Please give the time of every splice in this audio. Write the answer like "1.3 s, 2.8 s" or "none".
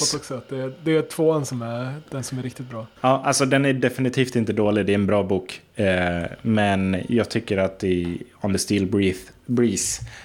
2.1 s, 3.0 s